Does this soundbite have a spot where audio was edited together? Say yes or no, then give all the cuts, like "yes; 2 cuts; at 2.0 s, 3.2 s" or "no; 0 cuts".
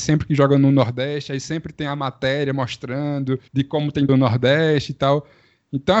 yes; 2 cuts; at 3.5 s, 4.1 s